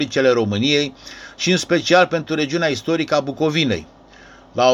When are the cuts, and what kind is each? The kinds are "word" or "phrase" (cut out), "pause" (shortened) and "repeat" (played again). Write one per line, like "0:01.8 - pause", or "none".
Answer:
none